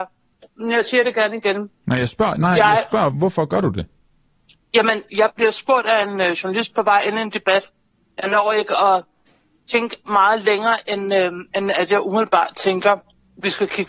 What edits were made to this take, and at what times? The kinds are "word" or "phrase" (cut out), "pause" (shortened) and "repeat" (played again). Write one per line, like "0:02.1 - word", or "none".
0:03.1 - word